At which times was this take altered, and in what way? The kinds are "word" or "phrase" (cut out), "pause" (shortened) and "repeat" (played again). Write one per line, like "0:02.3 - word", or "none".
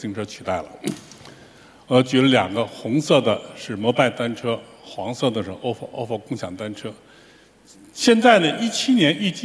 none